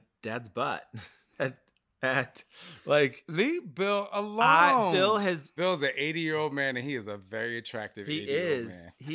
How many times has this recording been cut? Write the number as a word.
zero